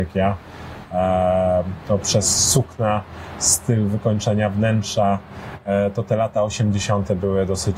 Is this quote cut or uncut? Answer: uncut